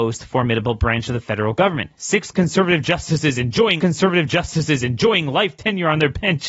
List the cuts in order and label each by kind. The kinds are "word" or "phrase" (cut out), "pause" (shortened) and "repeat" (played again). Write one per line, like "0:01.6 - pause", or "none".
0:01.9 - pause
0:03.8 - repeat